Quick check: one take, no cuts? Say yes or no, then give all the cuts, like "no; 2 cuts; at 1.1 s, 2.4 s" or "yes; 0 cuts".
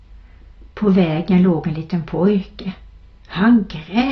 yes; 0 cuts